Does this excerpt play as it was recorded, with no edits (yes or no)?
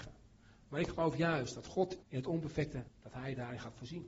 no